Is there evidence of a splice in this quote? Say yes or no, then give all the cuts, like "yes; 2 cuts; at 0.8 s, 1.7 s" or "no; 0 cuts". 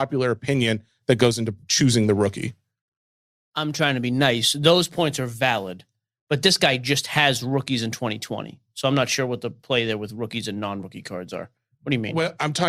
no; 0 cuts